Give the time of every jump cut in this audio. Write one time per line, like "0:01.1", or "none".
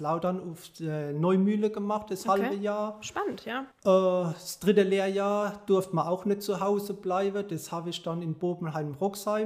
0:03.7